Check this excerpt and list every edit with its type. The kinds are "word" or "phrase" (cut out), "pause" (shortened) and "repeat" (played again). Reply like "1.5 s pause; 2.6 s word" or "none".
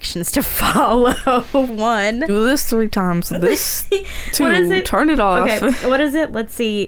1.7 s word